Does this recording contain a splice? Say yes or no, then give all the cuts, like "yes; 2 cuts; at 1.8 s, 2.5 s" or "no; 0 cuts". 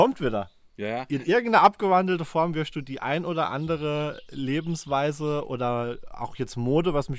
no; 0 cuts